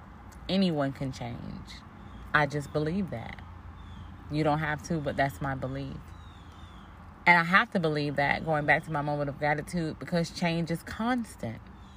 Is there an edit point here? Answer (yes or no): no